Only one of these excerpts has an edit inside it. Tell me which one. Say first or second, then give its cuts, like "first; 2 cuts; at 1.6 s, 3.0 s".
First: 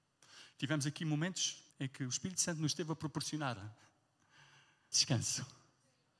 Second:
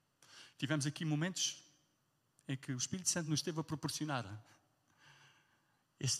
first; 2 cuts; at 1.7 s, 4.9 s